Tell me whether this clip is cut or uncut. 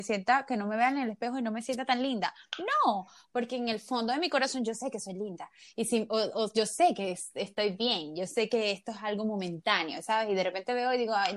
uncut